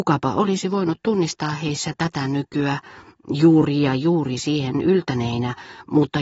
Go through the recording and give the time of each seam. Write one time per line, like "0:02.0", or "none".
none